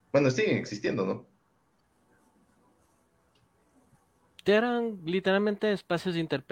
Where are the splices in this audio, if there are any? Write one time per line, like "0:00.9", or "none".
none